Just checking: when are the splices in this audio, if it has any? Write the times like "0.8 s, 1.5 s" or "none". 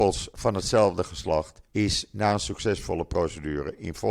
1.7 s